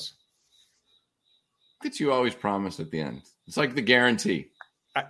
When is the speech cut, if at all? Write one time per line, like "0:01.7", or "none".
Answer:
0:01.8